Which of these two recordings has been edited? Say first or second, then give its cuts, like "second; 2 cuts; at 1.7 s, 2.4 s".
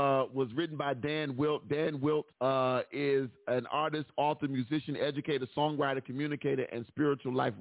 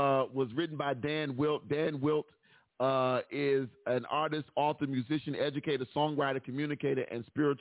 first; 1 cut; at 2.3 s